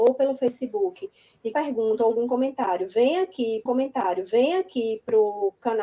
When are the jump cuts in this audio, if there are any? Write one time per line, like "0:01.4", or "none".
0:01.5
0:03.7